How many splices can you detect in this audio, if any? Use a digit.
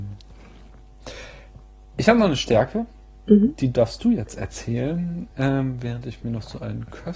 0